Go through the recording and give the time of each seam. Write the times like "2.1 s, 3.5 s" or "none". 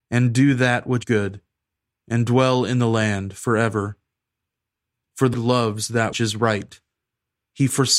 1.0 s, 5.3 s, 6.1 s